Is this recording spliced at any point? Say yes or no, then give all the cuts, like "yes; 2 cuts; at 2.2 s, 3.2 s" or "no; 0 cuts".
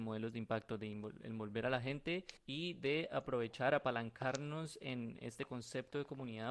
yes; 1 cut; at 2.4 s